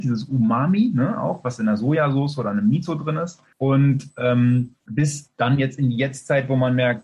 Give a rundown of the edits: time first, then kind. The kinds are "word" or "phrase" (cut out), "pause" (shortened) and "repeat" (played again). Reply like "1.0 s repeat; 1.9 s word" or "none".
3.5 s pause; 4.8 s pause